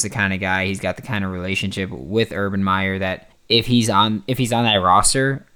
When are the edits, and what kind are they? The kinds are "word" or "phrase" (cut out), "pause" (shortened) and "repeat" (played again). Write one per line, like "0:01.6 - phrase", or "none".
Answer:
0:03.3 - pause